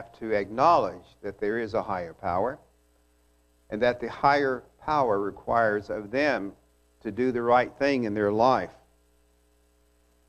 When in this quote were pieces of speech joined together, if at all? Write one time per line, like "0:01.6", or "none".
none